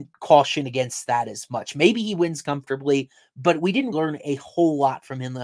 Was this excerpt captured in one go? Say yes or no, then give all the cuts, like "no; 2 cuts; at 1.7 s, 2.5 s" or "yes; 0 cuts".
no; 1 cut; at 3.9 s